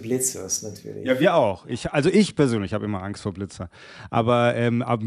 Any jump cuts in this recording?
no; 0 cuts

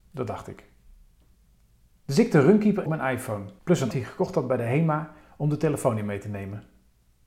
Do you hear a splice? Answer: yes; 4 cuts; at 1.3 s, 2.9 s, 3.6 s, 3.9 s

